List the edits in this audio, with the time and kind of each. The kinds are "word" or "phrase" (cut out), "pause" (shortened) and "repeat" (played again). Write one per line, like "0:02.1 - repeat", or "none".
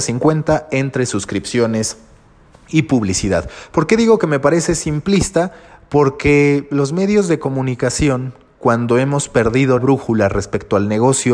0:09.8 - word